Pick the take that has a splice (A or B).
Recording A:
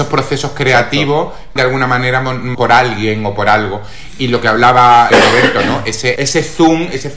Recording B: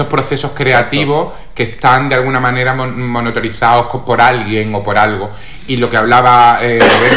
A